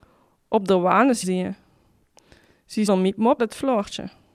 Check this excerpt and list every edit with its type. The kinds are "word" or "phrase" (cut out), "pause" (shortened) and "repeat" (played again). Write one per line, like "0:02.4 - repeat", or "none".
0:01.2 - word
0:02.9 - word
0:03.4 - word